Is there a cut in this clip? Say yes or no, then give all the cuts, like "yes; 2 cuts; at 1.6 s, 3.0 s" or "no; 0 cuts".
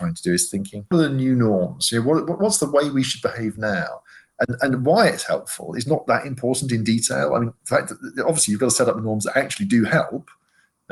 yes; 1 cut; at 0.9 s